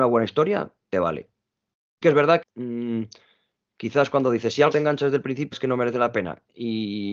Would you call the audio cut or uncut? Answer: cut